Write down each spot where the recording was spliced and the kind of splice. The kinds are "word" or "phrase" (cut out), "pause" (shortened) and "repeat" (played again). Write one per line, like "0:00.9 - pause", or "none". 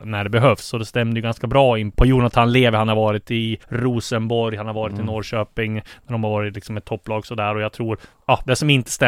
0:01.9 - word
0:03.6 - pause